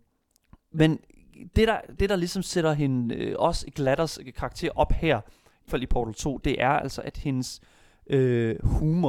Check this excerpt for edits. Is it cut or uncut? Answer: cut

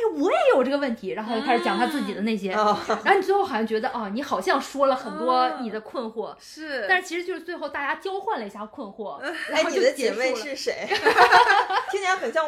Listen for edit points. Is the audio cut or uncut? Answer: uncut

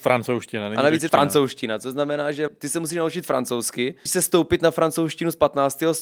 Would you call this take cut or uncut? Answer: cut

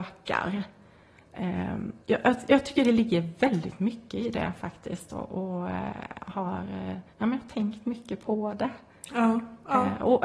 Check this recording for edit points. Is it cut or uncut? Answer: cut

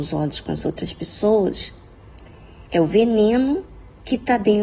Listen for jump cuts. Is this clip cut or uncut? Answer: cut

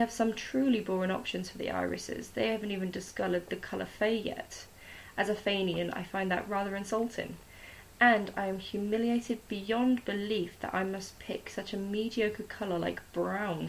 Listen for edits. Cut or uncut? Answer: uncut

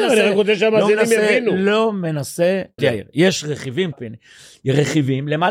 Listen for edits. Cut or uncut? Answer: cut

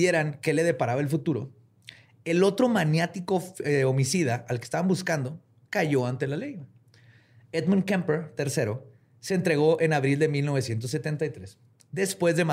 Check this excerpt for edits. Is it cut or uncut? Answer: uncut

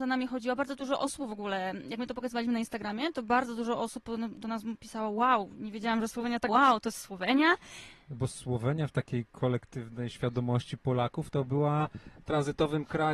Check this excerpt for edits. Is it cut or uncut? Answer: cut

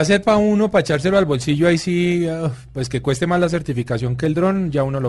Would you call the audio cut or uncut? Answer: uncut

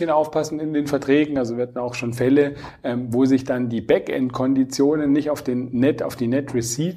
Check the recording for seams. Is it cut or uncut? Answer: uncut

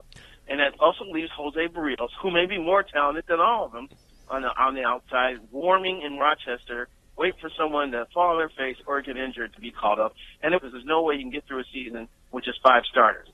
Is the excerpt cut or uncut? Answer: cut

